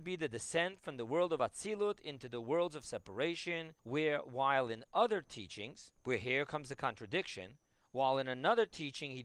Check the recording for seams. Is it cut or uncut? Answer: cut